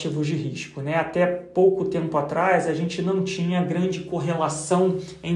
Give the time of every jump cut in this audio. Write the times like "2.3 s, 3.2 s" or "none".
none